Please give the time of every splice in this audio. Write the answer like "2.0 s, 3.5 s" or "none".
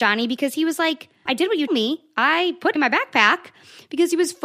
1.3 s, 1.7 s, 2.8 s